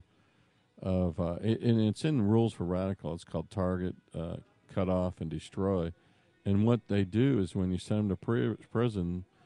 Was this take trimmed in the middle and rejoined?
no; 0 cuts

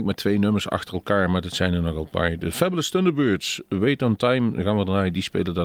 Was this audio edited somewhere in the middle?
no; 0 cuts

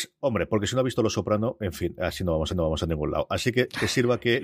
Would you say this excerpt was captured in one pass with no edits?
no; 1 cut; at 2.5 s

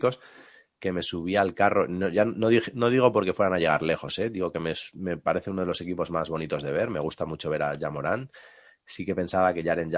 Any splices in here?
no; 0 cuts

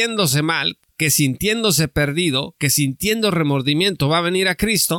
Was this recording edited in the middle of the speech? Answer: no; 0 cuts

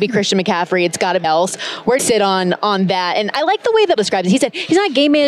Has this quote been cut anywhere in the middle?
yes; 3 cuts; at 1.2 s, 2.0 s, 4.0 s

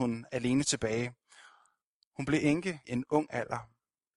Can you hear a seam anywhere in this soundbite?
yes; 1 cut; at 2.8 s

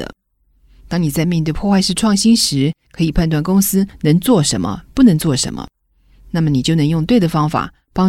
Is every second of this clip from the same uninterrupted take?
yes; 0 cuts

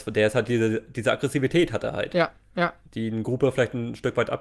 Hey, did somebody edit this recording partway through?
no; 0 cuts

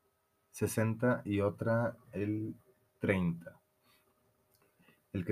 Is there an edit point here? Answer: no; 0 cuts

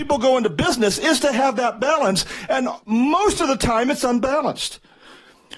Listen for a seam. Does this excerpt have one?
no; 0 cuts

